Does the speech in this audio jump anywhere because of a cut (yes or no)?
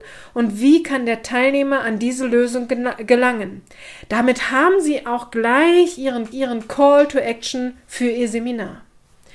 yes